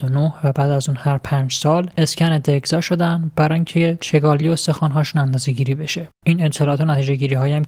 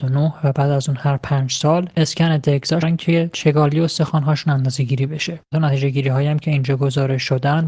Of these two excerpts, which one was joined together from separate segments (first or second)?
second